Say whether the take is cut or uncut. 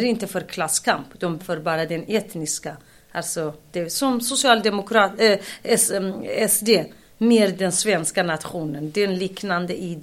cut